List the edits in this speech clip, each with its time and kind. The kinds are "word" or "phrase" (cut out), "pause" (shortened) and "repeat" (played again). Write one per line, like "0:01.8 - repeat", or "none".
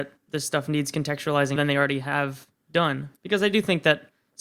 0:01.6 - word
0:03.2 - pause